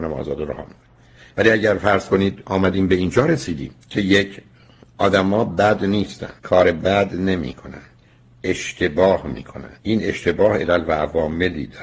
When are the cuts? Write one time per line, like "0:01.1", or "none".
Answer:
0:03.8
0:06.4
0:09.8